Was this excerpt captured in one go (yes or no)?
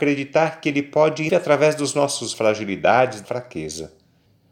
no